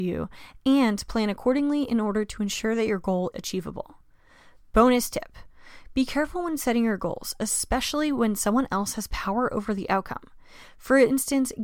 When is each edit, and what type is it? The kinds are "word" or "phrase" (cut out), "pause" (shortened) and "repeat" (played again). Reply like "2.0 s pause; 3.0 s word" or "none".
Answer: 3.3 s word